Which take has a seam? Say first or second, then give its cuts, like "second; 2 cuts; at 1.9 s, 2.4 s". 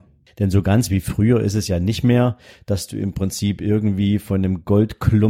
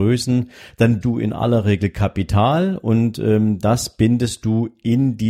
second; 1 cut; at 1.0 s